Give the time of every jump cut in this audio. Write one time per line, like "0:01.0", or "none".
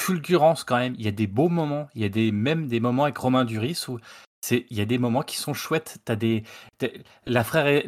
none